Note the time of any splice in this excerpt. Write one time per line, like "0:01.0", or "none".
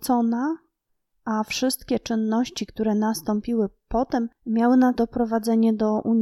0:04.9